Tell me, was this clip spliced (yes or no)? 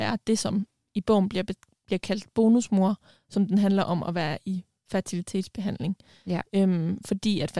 no